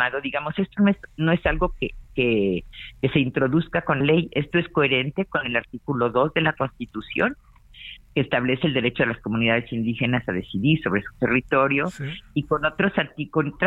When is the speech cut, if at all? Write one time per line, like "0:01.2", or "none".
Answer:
0:04.0